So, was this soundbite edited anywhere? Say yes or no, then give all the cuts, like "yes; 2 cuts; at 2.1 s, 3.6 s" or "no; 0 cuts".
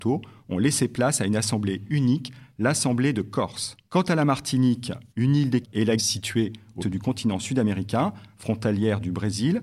yes; 5 cuts; at 3.9 s, 5.1 s, 5.6 s, 6.0 s, 6.8 s